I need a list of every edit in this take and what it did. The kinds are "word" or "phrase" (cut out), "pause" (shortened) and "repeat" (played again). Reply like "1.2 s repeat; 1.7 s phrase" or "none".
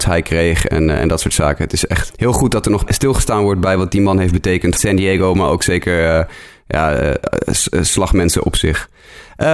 2.1 s word; 2.9 s word; 4.8 s phrase